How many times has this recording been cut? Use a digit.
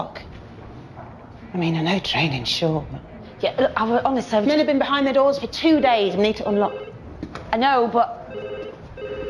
0